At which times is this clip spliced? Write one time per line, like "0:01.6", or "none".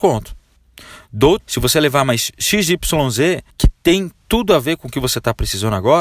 0:01.4
0:03.5